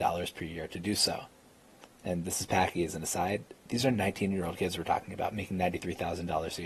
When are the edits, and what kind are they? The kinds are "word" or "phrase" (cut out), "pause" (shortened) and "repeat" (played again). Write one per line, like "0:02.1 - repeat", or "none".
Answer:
none

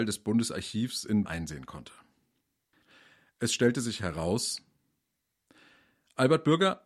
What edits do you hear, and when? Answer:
0:01.2 - word

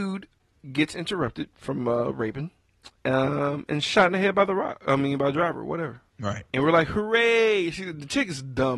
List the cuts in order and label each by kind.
0:06.1 - pause

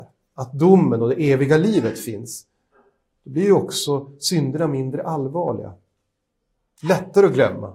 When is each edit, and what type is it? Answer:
none

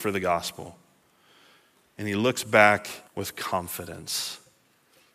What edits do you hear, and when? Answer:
0:03.1 - pause

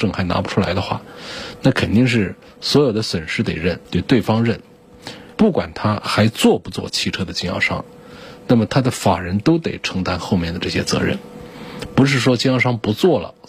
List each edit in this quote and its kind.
0:03.8 - pause
0:05.3 - phrase

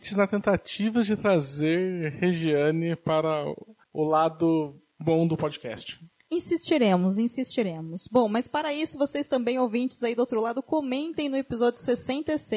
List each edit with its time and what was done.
none

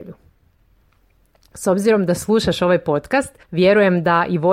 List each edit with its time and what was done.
0:03.4 - pause

